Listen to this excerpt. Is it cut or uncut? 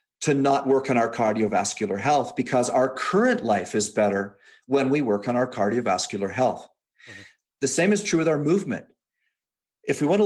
uncut